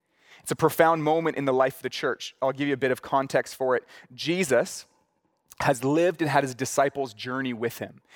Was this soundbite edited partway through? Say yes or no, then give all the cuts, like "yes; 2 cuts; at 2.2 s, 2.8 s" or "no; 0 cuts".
no; 0 cuts